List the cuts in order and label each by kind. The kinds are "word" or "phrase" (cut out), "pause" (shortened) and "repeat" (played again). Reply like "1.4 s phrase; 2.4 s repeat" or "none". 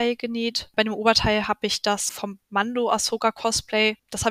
2.1 s word; 2.4 s pause